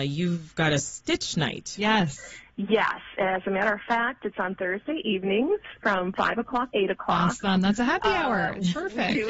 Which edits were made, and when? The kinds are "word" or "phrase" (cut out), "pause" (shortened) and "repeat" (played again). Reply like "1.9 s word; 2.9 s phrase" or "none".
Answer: 6.7 s word